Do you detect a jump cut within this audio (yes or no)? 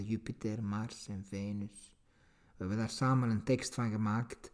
no